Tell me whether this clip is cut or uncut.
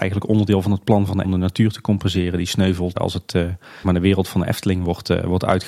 cut